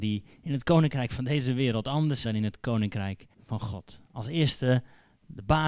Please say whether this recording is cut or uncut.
cut